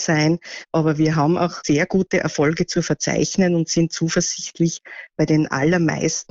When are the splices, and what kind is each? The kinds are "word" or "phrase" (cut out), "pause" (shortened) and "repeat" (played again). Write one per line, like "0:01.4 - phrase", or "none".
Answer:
none